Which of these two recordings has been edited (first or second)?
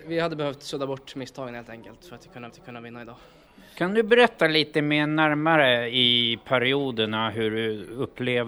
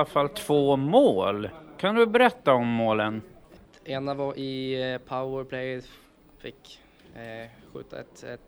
first